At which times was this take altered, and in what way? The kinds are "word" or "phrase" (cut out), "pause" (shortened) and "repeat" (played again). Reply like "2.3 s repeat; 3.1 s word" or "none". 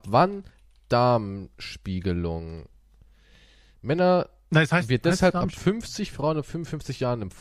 none